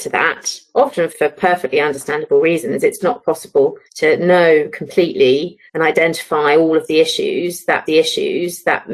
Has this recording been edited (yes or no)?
yes